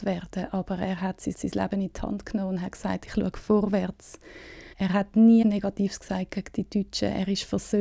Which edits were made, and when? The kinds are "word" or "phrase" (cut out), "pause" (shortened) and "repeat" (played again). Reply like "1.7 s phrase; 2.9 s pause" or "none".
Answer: 1.3 s repeat; 4.7 s pause; 5.4 s word

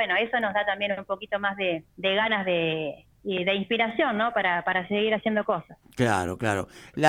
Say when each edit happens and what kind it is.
1.9 s pause; 3.1 s pause

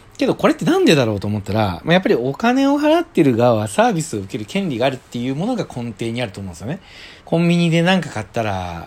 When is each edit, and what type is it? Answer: 7.2 s pause

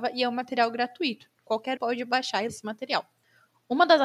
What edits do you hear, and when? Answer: 1.8 s word; 2.5 s word

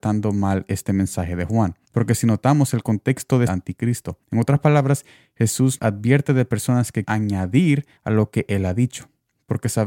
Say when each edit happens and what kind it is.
1.8 s pause; 3.5 s phrase; 4.2 s pause; 5.8 s word; 7.0 s word; 8.0 s pause

